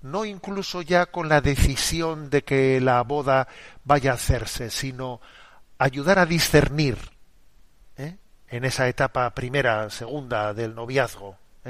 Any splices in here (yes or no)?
no